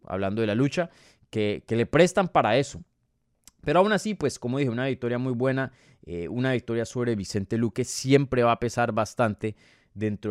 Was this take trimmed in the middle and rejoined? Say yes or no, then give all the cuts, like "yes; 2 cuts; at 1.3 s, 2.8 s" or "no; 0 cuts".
no; 0 cuts